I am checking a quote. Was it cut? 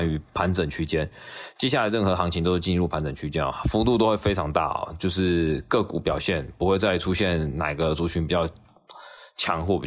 no; 0 cuts

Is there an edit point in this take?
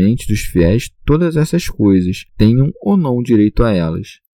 yes; 1 cut; at 2.3 s

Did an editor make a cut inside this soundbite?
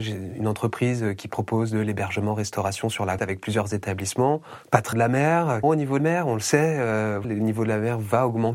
yes; 5 cuts; at 3.2 s, 4.9 s, 5.6 s, 6.0 s, 7.2 s

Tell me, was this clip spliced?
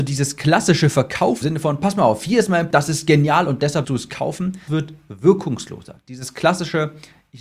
yes; 4 cuts; at 1.4 s, 2.7 s, 3.8 s, 4.7 s

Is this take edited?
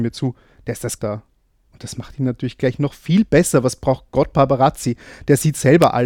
yes; 2 cuts; at 1.0 s, 4.3 s

